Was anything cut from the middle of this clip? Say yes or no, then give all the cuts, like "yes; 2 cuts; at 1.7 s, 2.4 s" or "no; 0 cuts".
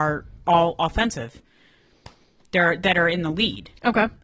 no; 0 cuts